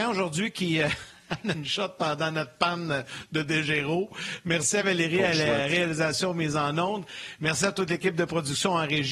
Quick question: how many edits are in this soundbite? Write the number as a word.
one